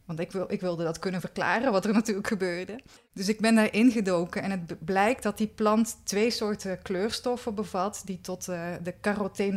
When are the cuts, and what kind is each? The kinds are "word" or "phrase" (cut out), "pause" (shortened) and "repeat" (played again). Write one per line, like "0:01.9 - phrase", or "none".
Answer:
0:03.0 - pause